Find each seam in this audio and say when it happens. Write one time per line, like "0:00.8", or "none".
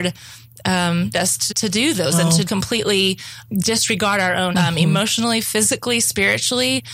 0:01.1
0:01.5
0:02.1
0:02.5
0:03.4
0:04.5